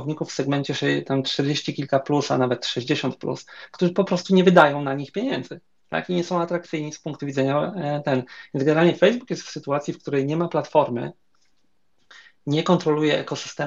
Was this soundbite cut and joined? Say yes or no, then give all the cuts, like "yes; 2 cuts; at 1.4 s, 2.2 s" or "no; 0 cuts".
no; 0 cuts